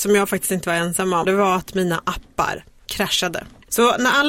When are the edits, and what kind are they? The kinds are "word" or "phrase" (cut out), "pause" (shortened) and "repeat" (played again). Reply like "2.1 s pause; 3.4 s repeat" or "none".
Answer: 1.2 s word